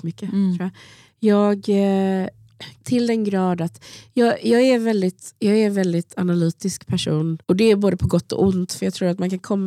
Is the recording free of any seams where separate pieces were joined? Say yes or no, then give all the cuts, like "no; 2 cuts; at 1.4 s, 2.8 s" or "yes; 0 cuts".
no; 2 cuts; at 2.8 s, 7.4 s